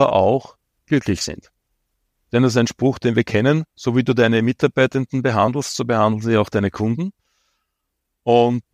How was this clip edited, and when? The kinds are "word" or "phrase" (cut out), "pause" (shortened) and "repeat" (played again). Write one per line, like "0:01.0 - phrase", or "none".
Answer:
0:03.7 - pause